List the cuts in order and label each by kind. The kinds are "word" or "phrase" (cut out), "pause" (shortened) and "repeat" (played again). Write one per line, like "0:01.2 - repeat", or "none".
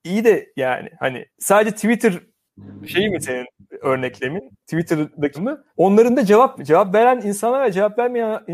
0:01.3 - pause
0:05.3 - word
0:05.7 - pause
0:06.6 - word